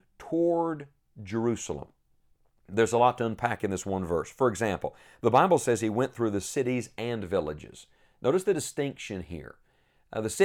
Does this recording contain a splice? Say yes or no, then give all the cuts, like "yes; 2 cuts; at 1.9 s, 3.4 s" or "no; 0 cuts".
no; 0 cuts